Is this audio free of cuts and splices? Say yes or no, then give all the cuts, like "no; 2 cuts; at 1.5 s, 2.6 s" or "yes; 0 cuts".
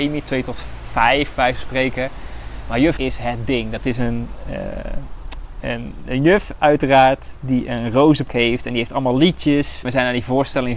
no; 3 cuts; at 3.0 s, 8.3 s, 9.8 s